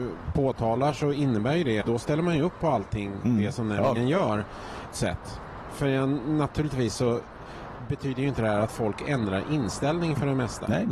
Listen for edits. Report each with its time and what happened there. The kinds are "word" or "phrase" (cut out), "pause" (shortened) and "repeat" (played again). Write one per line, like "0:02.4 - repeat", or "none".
0:01.8 - word
0:04.0 - word
0:04.9 - word